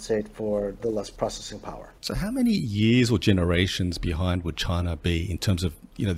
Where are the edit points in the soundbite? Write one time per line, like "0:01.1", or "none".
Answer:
0:02.0